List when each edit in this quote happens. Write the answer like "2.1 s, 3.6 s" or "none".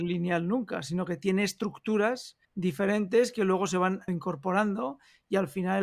2.4 s, 4.1 s

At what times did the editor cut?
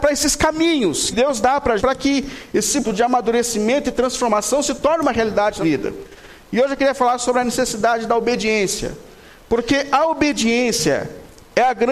1.1 s, 1.8 s, 2.8 s, 5.6 s

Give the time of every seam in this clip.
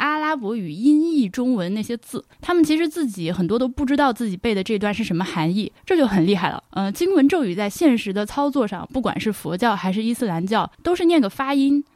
2.3 s, 5.8 s, 6.7 s, 10.7 s

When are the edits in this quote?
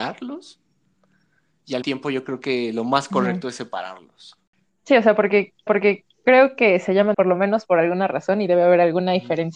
1.8 s, 5.7 s, 7.1 s

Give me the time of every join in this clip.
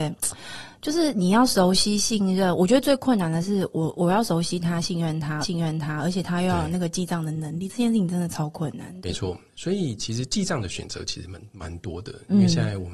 5.4 s

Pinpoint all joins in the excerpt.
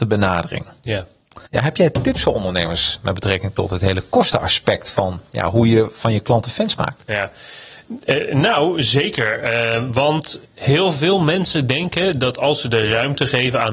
1.5 s

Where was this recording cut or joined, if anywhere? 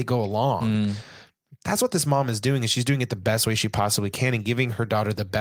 none

